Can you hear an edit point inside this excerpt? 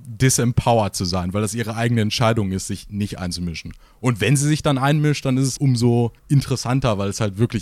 yes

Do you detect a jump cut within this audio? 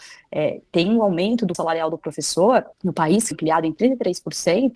yes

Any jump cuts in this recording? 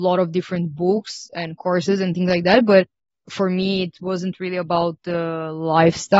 no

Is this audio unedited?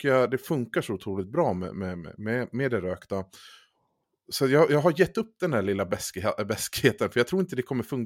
yes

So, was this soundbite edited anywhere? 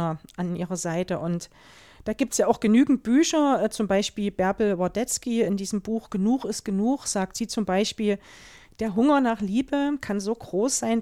no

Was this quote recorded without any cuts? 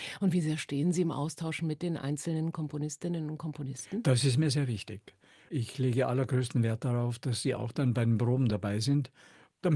yes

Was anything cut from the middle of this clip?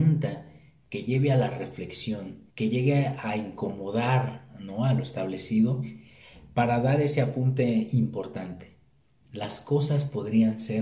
yes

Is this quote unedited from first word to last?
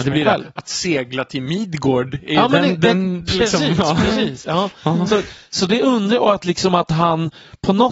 yes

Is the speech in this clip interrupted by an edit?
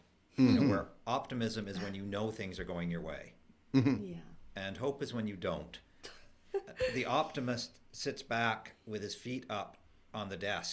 no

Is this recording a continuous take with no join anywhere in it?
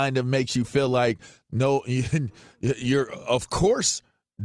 yes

